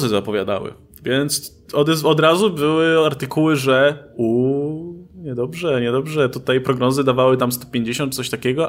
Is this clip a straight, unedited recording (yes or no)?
yes